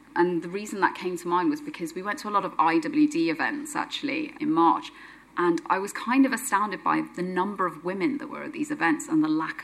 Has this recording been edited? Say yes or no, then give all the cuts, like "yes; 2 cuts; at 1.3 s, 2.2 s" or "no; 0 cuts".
no; 0 cuts